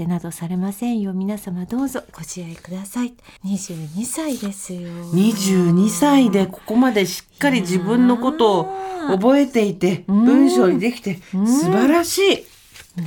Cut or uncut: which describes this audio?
cut